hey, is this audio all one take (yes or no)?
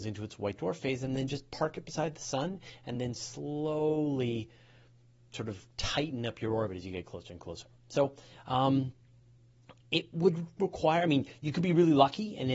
yes